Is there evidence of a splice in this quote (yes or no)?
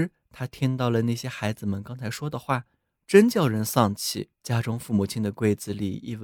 yes